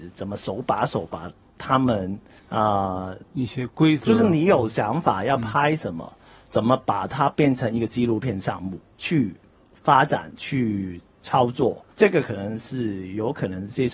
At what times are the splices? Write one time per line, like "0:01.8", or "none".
0:02.4
0:08.9
0:11.9